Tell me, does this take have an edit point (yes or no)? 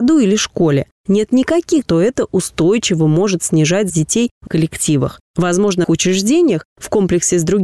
yes